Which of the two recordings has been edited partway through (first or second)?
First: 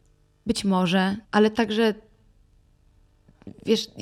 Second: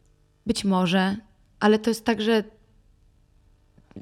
first